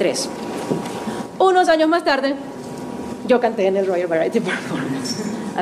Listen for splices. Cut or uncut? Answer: uncut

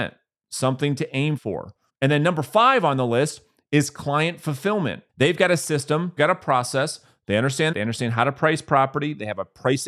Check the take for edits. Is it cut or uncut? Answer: cut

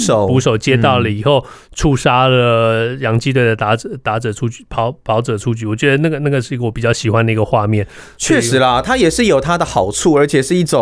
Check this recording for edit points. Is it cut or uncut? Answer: uncut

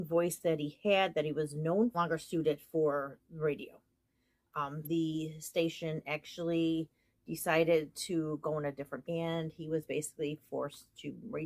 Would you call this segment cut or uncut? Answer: cut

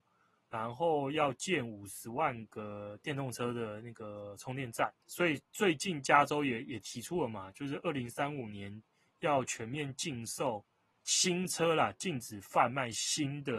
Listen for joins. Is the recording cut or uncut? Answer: cut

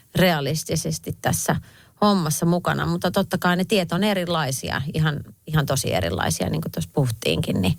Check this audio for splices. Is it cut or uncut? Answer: uncut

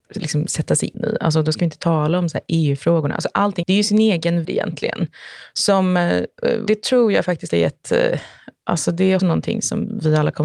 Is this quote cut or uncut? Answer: cut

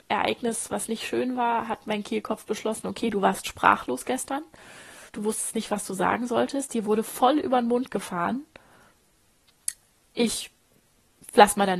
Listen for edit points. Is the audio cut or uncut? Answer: cut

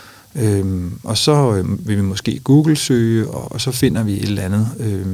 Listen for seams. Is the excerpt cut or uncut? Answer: uncut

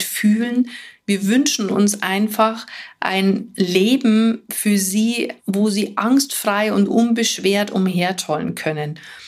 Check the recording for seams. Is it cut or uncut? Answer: cut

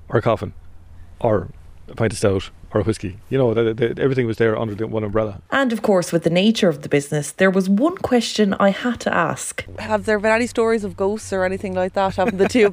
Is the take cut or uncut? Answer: uncut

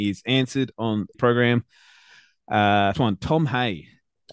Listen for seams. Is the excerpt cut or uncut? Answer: cut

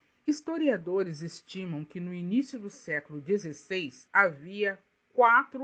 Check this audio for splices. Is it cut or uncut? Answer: cut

